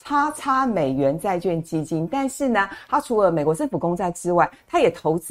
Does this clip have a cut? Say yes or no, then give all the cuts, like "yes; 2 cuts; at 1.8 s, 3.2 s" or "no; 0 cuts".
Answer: no; 0 cuts